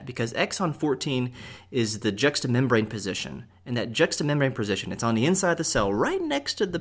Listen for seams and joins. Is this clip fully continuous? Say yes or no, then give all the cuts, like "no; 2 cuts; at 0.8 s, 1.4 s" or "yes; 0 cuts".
yes; 0 cuts